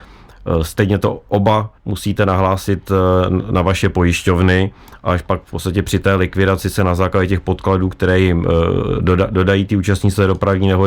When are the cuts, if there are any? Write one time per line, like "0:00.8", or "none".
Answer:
0:01.8